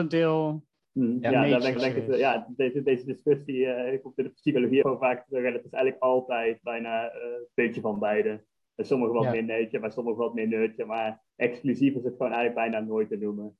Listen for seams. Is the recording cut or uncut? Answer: cut